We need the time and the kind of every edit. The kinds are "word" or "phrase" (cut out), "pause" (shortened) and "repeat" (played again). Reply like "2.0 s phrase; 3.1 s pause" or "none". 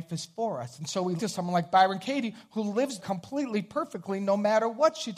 1.2 s word; 3.0 s word